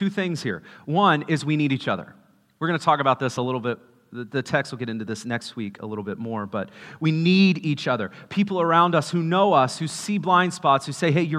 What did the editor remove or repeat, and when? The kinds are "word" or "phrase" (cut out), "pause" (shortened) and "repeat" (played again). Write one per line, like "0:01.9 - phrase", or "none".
none